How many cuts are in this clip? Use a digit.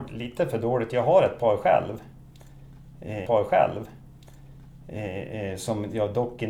1